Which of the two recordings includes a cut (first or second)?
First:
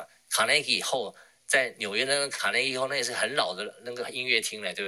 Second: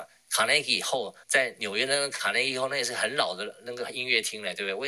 second